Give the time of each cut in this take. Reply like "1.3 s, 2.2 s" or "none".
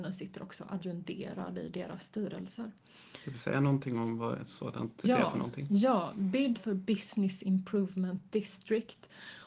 5.0 s, 6.5 s